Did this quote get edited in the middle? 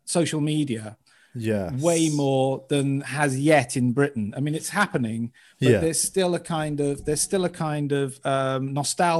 no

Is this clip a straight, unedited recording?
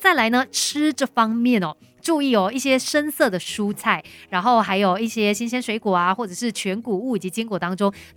yes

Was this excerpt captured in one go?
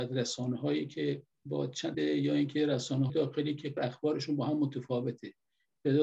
no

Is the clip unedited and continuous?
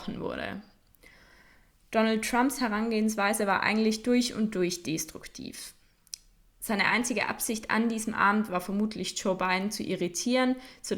yes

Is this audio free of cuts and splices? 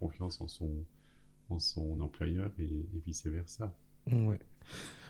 yes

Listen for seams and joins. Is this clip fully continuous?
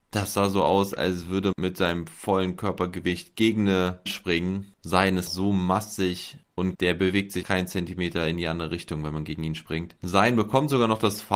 no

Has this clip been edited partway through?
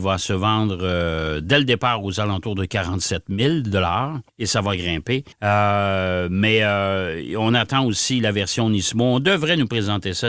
yes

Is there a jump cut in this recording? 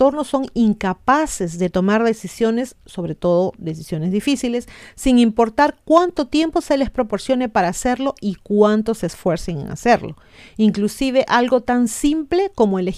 no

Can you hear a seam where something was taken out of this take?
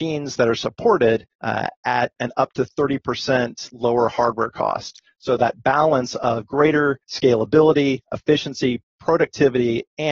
yes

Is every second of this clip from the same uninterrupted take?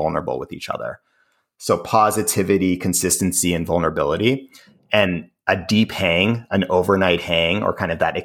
yes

